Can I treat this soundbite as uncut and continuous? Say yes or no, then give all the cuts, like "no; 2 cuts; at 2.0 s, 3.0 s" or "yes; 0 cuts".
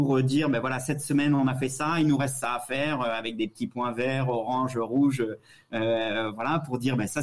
yes; 0 cuts